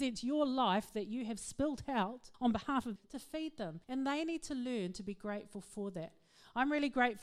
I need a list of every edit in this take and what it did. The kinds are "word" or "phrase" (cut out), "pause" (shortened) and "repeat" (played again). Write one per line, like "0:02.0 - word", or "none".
0:02.3 - pause
0:03.0 - word
0:03.8 - pause